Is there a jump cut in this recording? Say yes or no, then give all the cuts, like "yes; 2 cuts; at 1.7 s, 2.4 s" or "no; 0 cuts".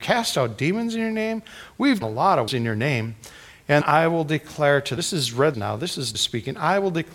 yes; 6 cuts; at 2.0 s, 2.5 s, 3.8 s, 5.0 s, 5.5 s, 6.1 s